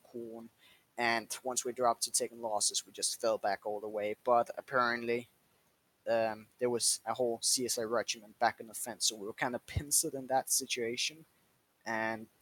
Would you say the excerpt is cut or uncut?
uncut